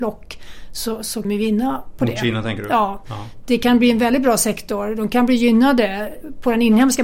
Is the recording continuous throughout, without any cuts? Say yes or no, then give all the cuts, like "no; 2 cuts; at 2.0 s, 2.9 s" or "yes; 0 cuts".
no; 1 cut; at 1.2 s